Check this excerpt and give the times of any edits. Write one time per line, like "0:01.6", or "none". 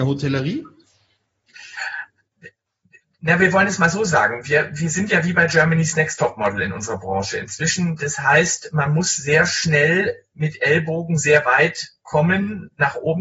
none